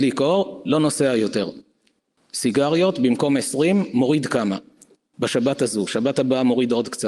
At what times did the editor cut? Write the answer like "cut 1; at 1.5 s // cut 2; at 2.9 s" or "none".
none

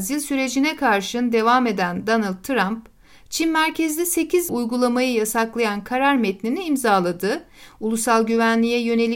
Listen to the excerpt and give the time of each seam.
cut 1; at 4.5 s

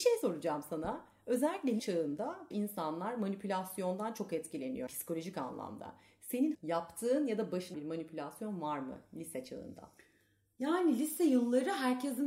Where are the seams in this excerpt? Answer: cut 1; at 1.8 s // cut 2; at 2.5 s // cut 3; at 4.9 s // cut 4; at 6.5 s // cut 5; at 7.7 s

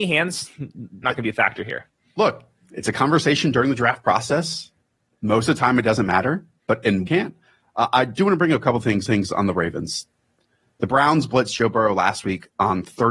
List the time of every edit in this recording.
cut 1; at 1.0 s // cut 2; at 7.1 s // cut 3; at 9.1 s

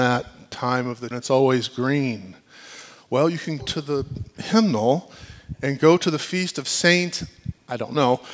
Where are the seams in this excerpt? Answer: cut 1; at 1.1 s // cut 2; at 3.6 s

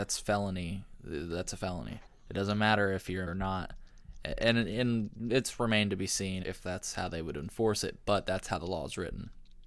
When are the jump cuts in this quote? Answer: cut 1; at 2.1 s // cut 2; at 3.3 s // cut 3; at 6.4 s

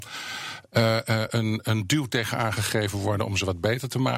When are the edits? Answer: none

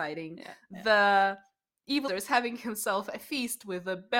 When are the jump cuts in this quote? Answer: cut 1; at 2.1 s

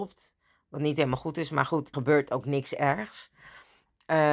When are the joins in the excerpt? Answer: cut 1; at 1.9 s

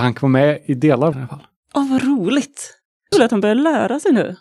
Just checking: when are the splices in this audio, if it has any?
cut 1; at 1.1 s // cut 2; at 3.1 s

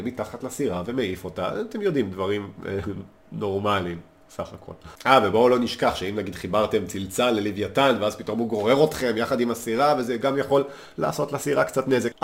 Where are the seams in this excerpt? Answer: none

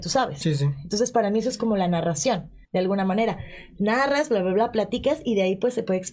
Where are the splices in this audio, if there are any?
cut 1; at 2.6 s

